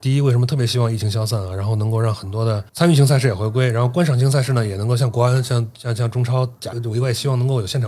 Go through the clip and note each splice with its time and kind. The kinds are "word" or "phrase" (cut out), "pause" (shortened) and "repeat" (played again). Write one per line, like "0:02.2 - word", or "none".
0:02.7 - pause
0:06.7 - word